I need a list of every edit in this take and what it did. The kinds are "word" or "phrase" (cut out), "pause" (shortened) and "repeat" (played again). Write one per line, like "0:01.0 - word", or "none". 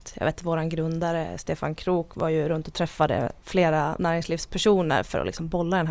none